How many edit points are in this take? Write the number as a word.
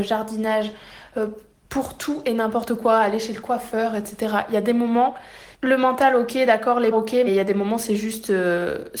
three